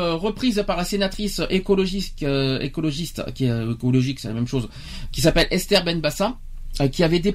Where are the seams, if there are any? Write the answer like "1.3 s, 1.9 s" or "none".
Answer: none